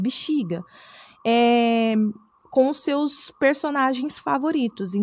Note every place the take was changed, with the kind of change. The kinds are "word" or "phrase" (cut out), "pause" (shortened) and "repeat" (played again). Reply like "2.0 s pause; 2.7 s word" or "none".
none